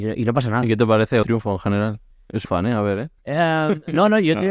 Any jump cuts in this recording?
yes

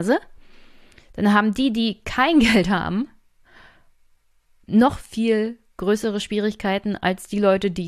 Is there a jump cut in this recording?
no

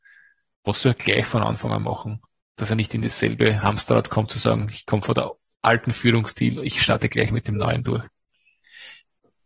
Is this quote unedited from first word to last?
yes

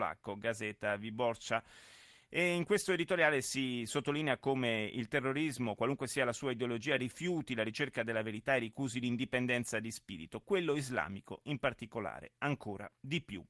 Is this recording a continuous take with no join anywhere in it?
yes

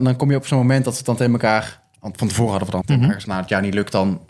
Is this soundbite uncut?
no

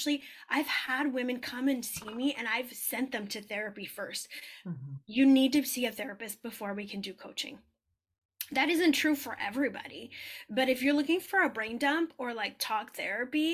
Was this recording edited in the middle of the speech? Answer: no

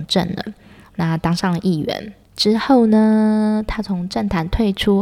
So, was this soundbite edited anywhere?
yes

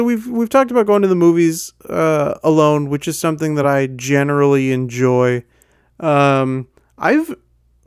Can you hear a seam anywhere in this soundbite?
no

